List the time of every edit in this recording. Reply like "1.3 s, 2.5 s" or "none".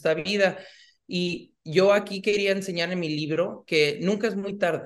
none